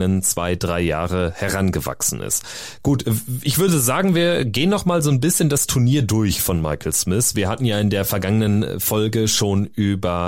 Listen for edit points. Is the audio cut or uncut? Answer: uncut